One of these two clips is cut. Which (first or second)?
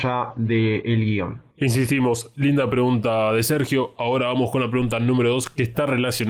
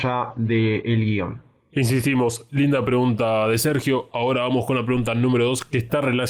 first